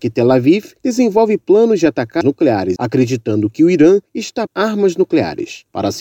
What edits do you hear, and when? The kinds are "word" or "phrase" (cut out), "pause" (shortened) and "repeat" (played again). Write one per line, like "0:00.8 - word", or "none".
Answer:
0:02.2 - word
0:02.8 - word
0:04.5 - phrase